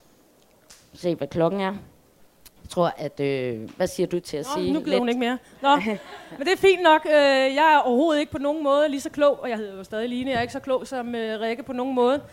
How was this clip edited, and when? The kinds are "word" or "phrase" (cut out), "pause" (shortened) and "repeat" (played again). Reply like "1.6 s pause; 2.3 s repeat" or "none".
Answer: 2.6 s pause

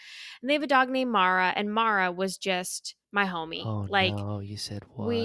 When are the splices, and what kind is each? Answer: 3.0 s pause

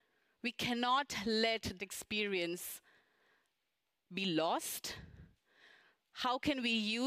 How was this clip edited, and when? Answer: 1.8 s word

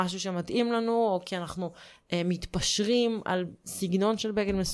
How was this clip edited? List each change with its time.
none

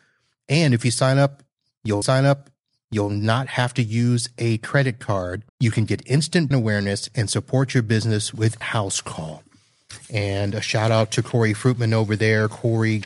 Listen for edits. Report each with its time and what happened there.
2.0 s repeat; 5.5 s pause; 6.5 s word; 8.6 s word

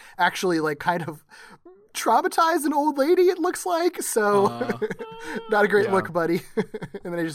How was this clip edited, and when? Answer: none

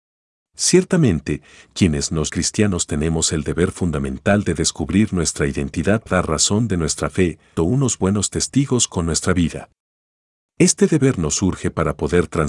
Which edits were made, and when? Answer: 2.3 s word; 6.1 s word; 7.6 s word

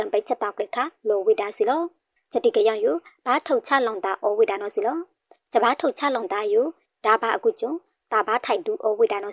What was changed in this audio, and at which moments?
none

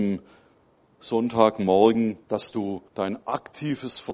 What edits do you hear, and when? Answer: 2.2 s pause; 2.9 s pause

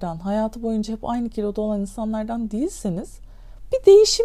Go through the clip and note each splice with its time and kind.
none

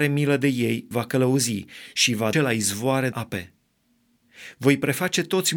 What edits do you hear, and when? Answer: 0.9 s word; 2.3 s word; 3.1 s word

